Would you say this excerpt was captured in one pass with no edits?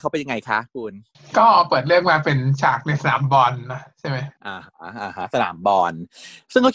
no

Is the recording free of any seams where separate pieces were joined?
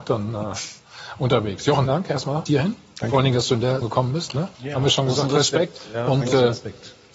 no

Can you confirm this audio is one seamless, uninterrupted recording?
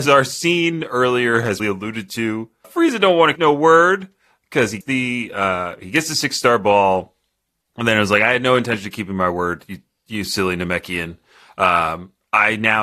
no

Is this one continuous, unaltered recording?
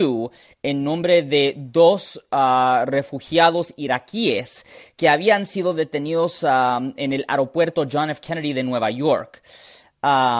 yes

